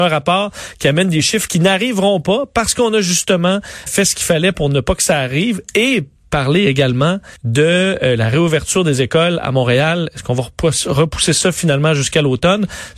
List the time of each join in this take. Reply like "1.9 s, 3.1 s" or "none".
3.9 s, 7.4 s